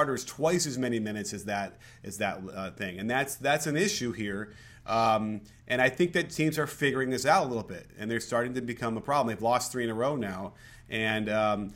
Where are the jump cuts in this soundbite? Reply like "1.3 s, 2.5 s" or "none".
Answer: none